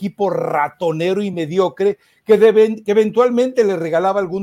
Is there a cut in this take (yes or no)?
no